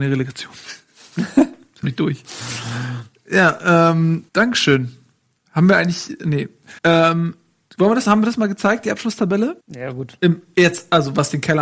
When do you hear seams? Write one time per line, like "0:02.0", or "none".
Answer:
0:01.8
0:04.3
0:06.8
0:09.6